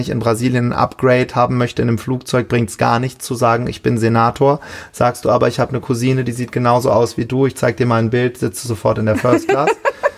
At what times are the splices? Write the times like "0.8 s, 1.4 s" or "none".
none